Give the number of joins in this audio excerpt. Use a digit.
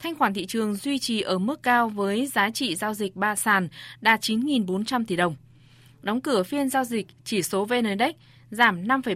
0